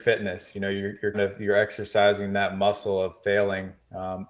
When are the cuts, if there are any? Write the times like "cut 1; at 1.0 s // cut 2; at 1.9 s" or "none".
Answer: cut 1; at 1.1 s